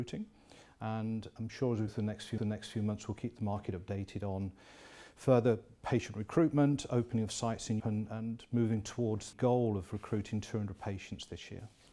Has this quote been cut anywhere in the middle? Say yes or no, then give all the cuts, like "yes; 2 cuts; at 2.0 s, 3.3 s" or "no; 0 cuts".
yes; 4 cuts; at 1.9 s, 2.4 s, 7.8 s, 9.3 s